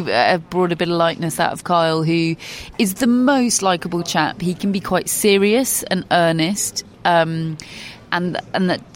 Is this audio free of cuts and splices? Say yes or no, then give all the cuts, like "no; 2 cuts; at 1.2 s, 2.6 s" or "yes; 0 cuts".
no; 1 cut; at 6.9 s